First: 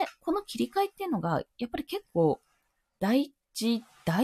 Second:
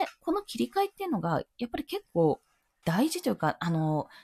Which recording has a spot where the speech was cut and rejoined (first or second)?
second